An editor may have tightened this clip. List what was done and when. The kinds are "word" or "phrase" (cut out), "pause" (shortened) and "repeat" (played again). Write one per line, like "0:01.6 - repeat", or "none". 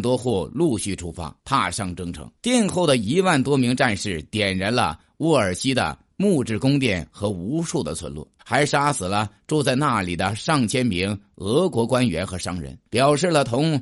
0:01.4 - pause
0:02.4 - pause
0:08.4 - pause
0:12.9 - pause